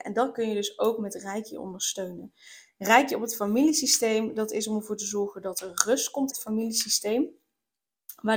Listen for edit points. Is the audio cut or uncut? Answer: cut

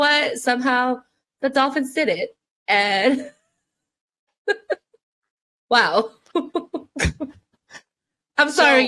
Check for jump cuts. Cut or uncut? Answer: uncut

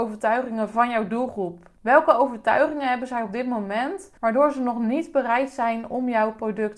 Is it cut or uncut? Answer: cut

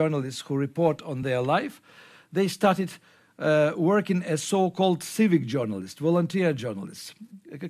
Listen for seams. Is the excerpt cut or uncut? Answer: uncut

